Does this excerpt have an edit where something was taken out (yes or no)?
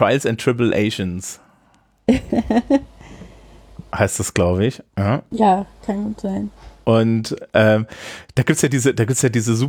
yes